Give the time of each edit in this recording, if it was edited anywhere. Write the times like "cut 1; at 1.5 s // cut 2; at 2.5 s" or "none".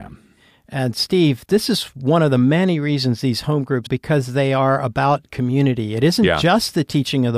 cut 1; at 1.5 s // cut 2; at 3.9 s